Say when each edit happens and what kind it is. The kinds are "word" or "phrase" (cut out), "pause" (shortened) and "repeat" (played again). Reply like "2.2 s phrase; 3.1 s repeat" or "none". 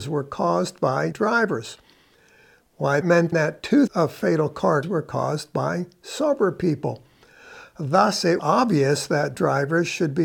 1.1 s word; 3.0 s word; 3.3 s word; 3.9 s word; 4.8 s word; 8.4 s word; 9.3 s word